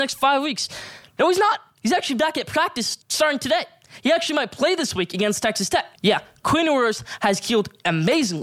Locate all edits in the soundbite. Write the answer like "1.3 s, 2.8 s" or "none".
3.0 s, 6.0 s